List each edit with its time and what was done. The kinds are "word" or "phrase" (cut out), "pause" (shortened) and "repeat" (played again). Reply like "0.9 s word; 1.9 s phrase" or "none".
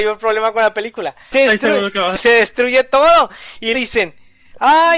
1.3 s word; 2.1 s phrase; 3.7 s word

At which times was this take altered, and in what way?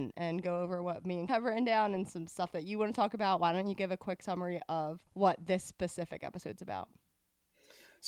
1.3 s word; 5.1 s pause

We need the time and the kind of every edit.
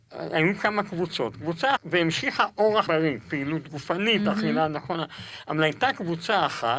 1.8 s phrase; 2.9 s word

